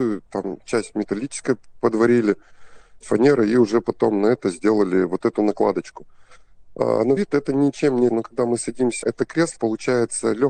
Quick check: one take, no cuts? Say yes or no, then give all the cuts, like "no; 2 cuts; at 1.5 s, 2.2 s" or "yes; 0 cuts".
no; 5 cuts; at 3.0 s, 7.2 s, 8.1 s, 9.0 s, 9.6 s